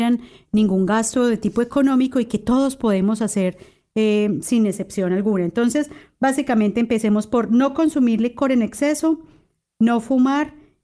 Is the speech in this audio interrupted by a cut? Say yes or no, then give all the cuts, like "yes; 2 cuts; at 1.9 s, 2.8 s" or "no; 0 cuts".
no; 0 cuts